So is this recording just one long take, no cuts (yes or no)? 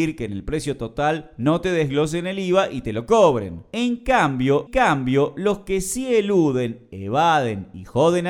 no